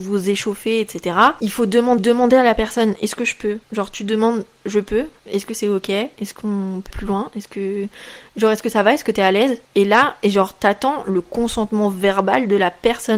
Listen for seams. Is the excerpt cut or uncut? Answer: cut